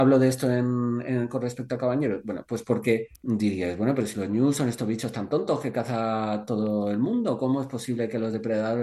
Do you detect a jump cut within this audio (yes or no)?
yes